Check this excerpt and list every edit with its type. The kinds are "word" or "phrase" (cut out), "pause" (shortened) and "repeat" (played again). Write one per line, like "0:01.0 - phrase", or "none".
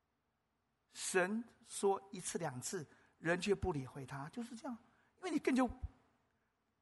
none

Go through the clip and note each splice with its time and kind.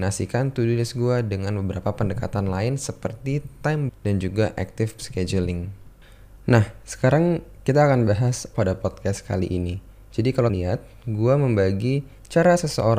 0:03.9 - word
0:05.0 - word
0:08.5 - word
0:10.5 - word

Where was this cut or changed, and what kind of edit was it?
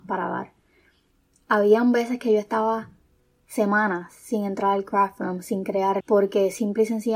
0:06.0 - word

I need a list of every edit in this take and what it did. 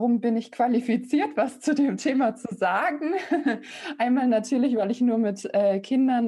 none

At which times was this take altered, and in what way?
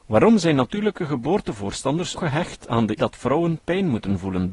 0:02.2 - word
0:03.0 - word

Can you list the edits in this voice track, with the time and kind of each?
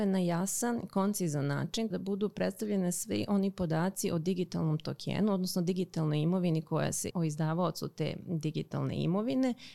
0:01.9 - word
0:07.1 - word

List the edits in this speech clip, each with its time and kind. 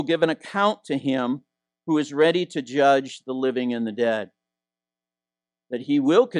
none

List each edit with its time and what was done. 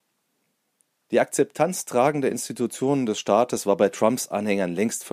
none

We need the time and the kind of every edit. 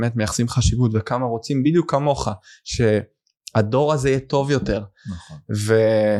none

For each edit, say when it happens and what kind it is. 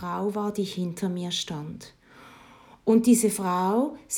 none

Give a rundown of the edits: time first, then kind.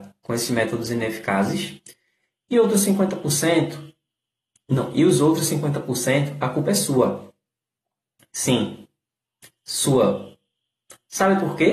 none

